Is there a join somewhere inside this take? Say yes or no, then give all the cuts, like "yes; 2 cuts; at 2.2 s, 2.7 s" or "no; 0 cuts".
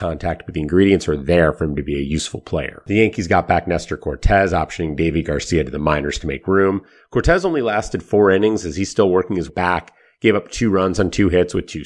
yes; 1 cut; at 9.5 s